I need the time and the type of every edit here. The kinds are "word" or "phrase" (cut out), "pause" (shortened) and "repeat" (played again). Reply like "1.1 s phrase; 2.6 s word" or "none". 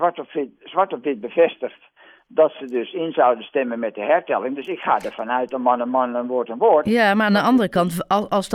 none